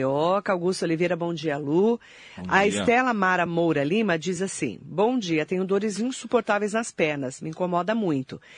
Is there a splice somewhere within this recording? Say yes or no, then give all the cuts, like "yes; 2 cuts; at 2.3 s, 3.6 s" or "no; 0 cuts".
no; 0 cuts